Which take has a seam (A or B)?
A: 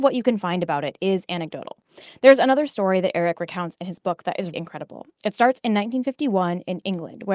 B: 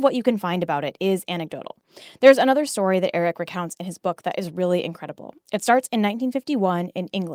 A